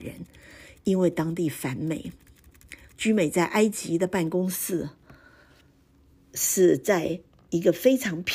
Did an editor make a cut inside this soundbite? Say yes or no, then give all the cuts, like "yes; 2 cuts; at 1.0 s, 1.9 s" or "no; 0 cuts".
yes; 1 cut; at 2.8 s